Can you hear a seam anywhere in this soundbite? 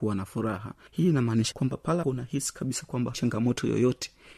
yes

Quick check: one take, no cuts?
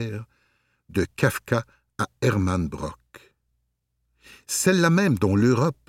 yes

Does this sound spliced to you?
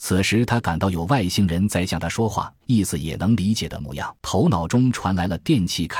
yes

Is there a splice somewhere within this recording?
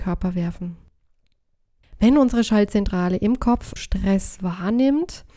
yes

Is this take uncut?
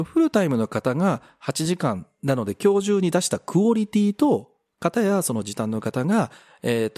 yes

